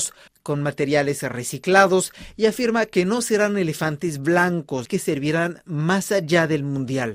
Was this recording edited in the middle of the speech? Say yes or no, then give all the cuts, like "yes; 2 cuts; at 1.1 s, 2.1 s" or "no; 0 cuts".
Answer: yes; 1 cut; at 4.9 s